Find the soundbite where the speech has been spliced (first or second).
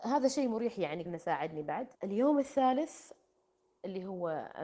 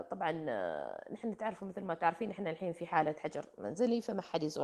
first